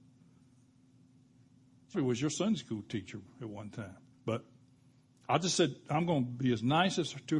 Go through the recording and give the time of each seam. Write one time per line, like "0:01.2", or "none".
0:01.9
0:04.1